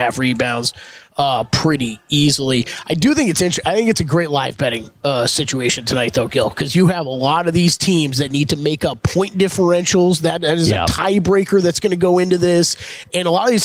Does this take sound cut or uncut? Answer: uncut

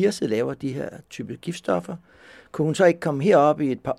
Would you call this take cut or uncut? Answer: uncut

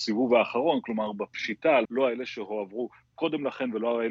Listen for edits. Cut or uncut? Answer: cut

